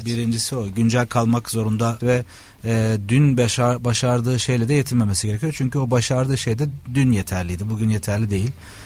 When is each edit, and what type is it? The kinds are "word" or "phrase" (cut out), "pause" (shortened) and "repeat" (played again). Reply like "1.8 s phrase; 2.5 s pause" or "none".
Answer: 2.0 s word